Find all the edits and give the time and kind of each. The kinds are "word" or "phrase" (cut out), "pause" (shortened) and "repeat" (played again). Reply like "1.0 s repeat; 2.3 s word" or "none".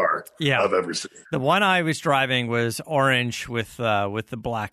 1.2 s pause